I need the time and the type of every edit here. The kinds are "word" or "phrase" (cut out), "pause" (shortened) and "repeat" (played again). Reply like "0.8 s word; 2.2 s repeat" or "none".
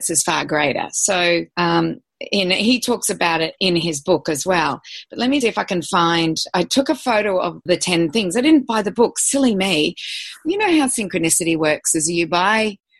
1.5 s pause; 3.6 s word; 5.4 s word; 7.7 s phrase